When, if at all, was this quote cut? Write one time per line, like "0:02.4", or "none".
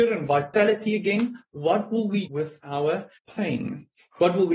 0:02.3
0:03.2

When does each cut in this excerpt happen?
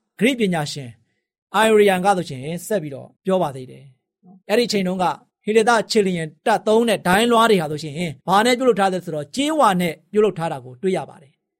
0:03.1
0:04.4
0:05.3
0:06.4
0:08.2

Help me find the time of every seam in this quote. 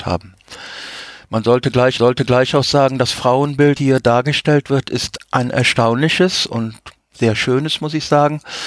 0:02.0
0:03.8
0:05.2
0:06.5

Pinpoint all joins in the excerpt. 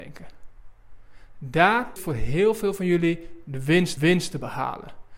0:02.0
0:04.0

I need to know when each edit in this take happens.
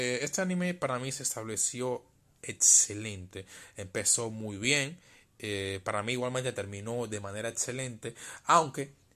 none

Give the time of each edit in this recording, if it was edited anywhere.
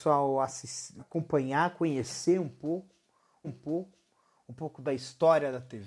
0:01.0
0:03.4

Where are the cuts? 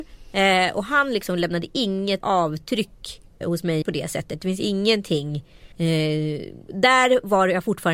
0:02.2
0:03.4
0:03.8
0:05.7

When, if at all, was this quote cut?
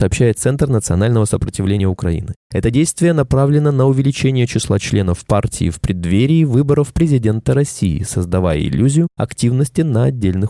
none

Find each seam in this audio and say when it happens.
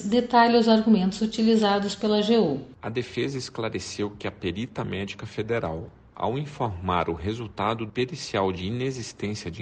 0:07.9

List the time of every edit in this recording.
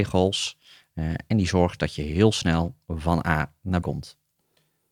0:03.8

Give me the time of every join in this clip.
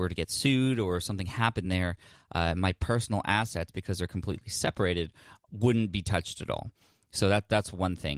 none

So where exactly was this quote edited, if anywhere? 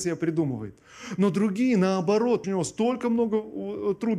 0:02.4

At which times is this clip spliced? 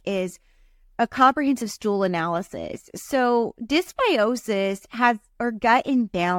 none

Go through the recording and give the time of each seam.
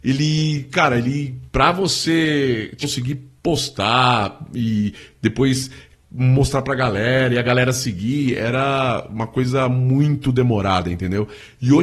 none

